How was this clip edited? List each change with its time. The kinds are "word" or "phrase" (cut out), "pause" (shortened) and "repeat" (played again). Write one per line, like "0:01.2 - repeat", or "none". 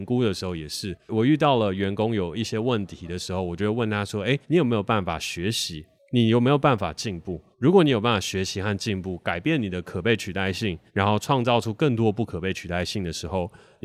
0:04.4 - pause
0:06.0 - pause
0:07.5 - pause
0:10.9 - pause